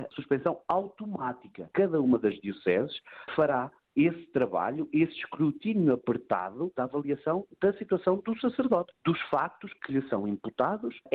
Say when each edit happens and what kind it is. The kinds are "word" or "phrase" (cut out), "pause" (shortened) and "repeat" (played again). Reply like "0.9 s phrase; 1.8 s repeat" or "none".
none